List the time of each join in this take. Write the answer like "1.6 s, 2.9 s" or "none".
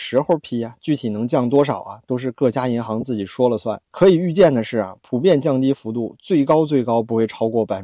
3.8 s

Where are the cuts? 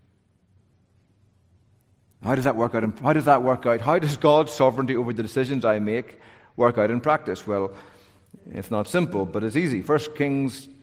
none

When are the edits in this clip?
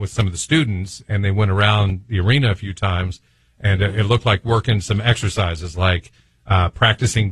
none

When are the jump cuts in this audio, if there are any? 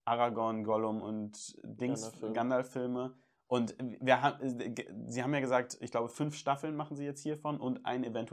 none

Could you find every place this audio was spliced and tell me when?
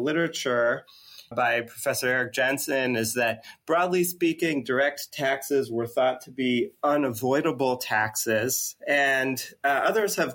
1.3 s, 8.8 s

